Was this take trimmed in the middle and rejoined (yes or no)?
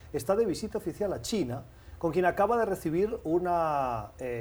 no